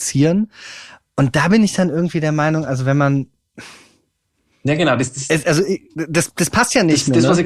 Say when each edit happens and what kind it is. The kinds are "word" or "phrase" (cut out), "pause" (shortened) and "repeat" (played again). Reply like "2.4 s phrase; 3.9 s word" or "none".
none